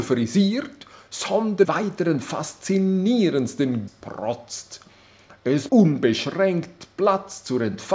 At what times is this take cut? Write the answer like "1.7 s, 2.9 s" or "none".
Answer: 1.6 s, 3.9 s, 5.7 s